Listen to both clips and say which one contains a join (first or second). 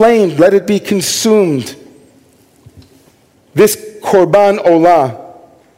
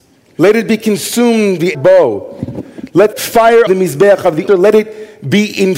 second